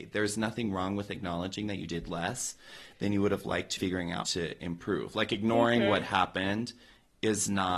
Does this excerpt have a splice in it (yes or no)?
yes